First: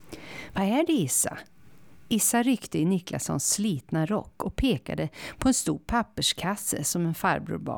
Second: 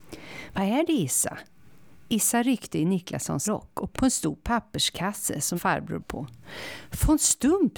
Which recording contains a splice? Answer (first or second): second